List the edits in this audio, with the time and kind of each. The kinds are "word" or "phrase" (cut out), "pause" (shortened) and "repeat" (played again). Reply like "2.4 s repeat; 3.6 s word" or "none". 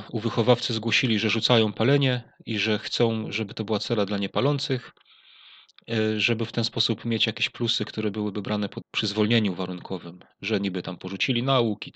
8.8 s word